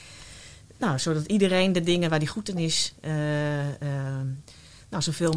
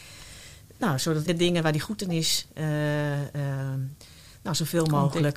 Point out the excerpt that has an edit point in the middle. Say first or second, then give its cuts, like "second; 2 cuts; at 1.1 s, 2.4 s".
second; 1 cut; at 1.3 s